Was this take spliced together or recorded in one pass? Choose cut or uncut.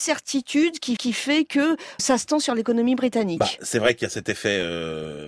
cut